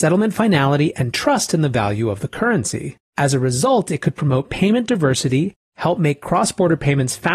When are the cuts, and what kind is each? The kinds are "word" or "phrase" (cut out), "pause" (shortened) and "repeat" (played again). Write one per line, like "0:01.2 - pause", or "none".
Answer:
0:03.0 - pause